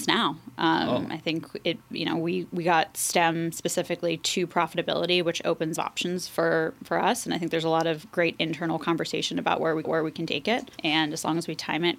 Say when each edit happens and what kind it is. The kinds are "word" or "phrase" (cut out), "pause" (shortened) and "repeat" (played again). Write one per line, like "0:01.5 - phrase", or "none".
0:05.8 - phrase
0:09.8 - repeat
0:10.7 - pause